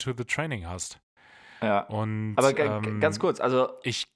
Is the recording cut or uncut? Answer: uncut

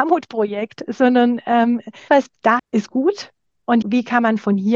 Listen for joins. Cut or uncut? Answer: cut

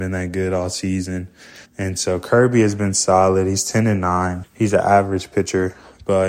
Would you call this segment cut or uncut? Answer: cut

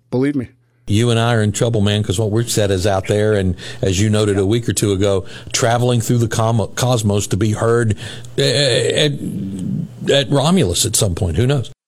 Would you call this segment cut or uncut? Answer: uncut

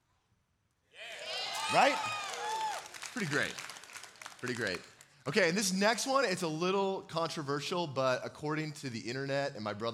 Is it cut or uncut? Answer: uncut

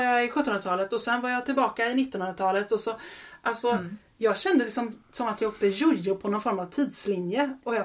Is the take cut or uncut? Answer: uncut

